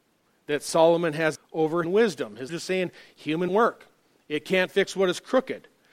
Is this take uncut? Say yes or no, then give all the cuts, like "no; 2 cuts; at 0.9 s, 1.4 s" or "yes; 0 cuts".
no; 4 cuts; at 1.4 s, 1.8 s, 2.5 s, 3.5 s